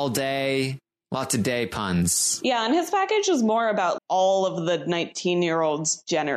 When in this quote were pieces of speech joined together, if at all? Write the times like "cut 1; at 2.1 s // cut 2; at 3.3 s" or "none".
cut 1; at 4.0 s